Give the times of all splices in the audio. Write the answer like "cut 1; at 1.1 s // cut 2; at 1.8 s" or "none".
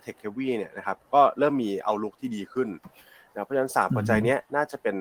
none